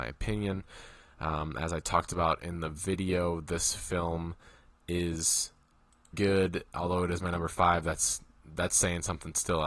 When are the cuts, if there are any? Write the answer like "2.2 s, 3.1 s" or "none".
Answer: 6.1 s

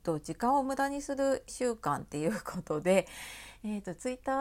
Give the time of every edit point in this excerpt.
1.5 s

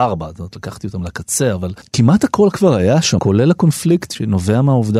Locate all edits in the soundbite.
3.2 s

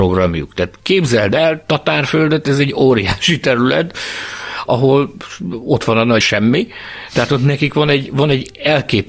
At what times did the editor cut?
4.7 s, 6.2 s

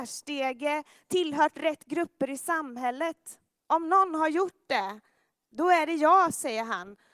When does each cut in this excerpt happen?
none

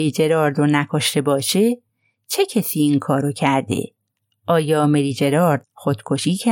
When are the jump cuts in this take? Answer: none

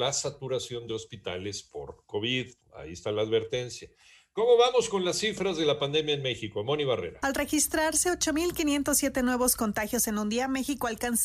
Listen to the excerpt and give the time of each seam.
none

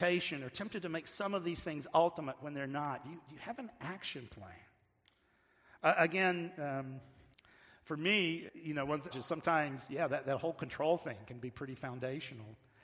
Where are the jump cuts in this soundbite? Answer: 7.3 s, 8.5 s, 9.1 s

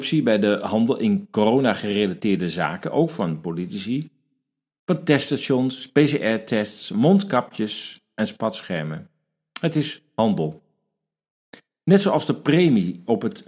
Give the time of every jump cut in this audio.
none

